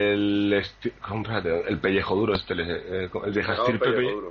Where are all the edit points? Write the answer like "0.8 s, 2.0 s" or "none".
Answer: none

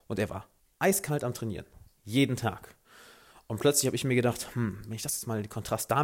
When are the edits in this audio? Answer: none

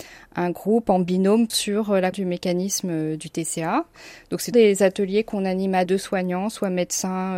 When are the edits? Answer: 1.5 s, 2.1 s, 4.5 s, 5.9 s

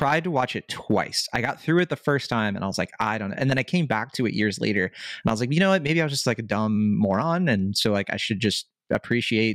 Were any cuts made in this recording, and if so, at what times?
none

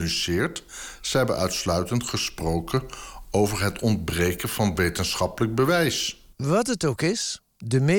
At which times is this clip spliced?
6.3 s

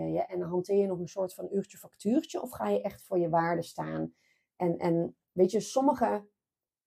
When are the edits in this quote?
none

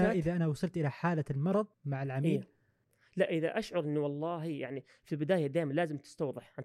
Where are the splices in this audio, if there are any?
1.7 s, 3.3 s

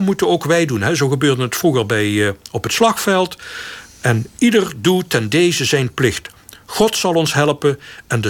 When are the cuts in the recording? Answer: none

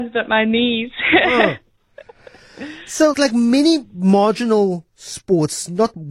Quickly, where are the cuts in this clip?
3.1 s

